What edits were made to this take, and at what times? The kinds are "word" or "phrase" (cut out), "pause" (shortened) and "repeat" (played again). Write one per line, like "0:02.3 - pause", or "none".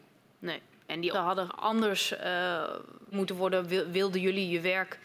0:01.1 - word
0:01.5 - word
0:03.1 - word